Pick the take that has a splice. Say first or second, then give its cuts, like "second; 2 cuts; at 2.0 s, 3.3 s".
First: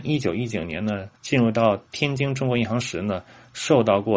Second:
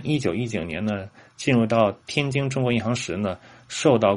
first; 1 cut; at 1.2 s